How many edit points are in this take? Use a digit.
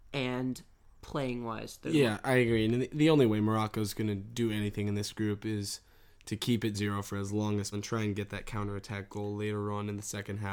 2